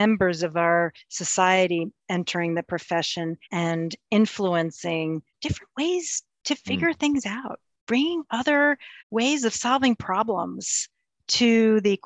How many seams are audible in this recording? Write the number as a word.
three